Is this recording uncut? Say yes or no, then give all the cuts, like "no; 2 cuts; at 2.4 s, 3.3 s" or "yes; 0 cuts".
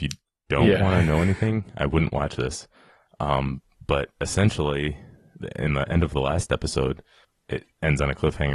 yes; 0 cuts